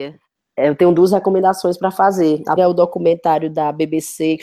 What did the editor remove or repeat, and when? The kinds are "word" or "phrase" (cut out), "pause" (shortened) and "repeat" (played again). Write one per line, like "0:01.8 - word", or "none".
0:02.6 - word